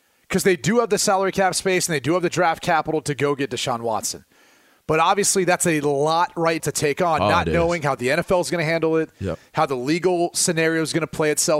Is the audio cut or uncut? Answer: cut